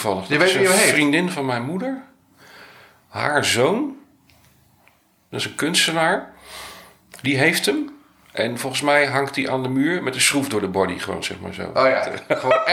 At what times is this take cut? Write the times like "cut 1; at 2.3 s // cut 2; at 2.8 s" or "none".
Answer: none